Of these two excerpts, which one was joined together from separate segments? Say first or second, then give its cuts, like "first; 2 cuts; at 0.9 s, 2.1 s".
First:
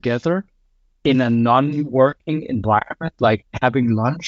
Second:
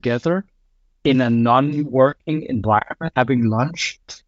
second; 1 cut; at 3.1 s